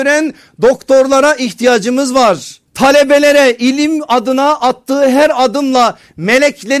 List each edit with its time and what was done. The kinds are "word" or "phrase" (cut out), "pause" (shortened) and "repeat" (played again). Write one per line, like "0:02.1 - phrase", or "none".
0:02.7 - pause